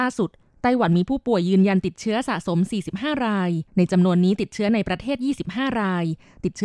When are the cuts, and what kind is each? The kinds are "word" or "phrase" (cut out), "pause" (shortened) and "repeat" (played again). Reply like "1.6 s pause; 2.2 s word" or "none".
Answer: 3.7 s pause